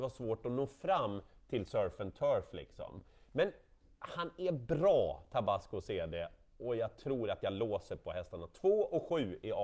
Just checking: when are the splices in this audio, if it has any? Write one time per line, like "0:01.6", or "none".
none